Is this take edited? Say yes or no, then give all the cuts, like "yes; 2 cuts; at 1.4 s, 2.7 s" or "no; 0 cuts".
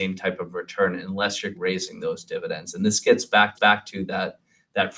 yes; 2 cuts; at 1.5 s, 3.5 s